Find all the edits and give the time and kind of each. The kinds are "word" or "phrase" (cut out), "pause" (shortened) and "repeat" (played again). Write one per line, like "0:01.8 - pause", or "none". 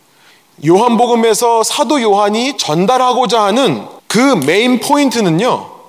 0:04.0 - pause